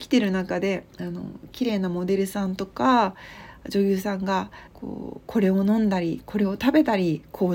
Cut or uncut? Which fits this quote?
cut